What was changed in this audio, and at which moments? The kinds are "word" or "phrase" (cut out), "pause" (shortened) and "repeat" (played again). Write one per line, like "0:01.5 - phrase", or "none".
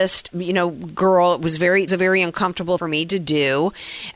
0:01.9 - phrase
0:02.8 - phrase